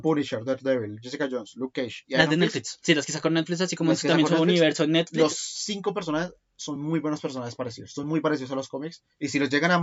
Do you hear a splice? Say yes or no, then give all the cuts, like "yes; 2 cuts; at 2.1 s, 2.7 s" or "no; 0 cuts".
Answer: no; 0 cuts